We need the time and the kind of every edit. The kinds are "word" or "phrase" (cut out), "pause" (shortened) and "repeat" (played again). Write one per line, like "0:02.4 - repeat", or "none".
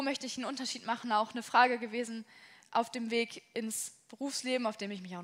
0:02.6 - word